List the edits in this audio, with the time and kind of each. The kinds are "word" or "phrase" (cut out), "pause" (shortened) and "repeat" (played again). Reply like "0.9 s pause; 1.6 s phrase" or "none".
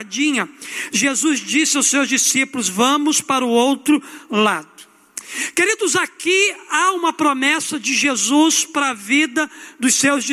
none